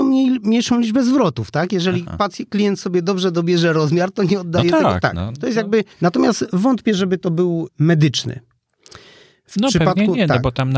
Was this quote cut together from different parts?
yes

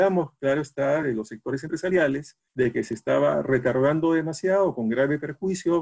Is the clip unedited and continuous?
yes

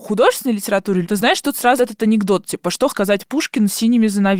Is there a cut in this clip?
yes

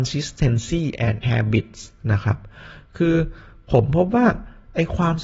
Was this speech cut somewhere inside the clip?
yes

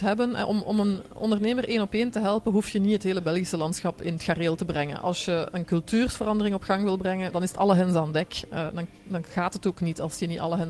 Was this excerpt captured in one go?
no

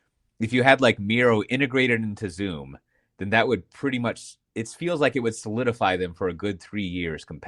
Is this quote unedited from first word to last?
yes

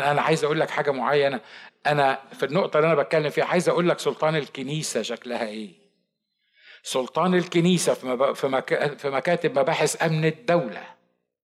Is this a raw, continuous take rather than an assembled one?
yes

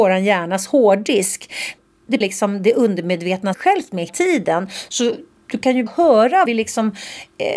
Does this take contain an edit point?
yes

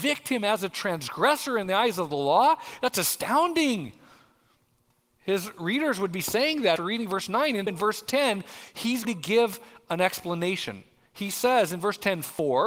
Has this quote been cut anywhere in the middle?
yes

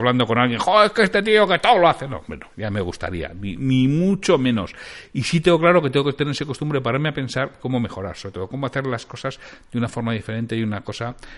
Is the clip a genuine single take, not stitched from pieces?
yes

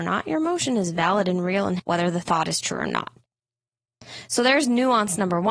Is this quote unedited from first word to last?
no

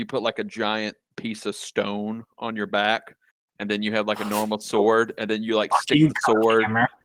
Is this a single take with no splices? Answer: yes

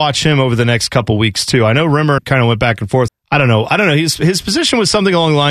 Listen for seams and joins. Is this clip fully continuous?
no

